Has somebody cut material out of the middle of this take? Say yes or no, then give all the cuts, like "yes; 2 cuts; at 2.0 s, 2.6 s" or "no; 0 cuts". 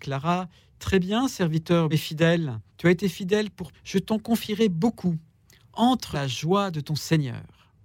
yes; 4 cuts; at 1.9 s, 2.7 s, 3.7 s, 6.1 s